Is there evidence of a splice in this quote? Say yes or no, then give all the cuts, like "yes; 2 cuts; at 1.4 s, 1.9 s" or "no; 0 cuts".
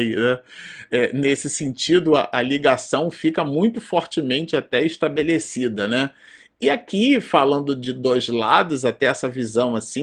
no; 0 cuts